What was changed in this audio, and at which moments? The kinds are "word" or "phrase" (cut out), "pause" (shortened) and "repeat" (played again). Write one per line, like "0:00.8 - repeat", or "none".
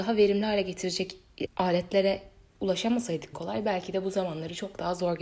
0:01.5 - word
0:03.3 - phrase